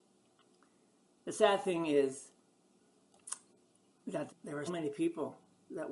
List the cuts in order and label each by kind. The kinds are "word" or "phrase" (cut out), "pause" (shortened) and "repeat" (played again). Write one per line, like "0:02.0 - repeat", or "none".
0:04.3 - word
0:04.7 - word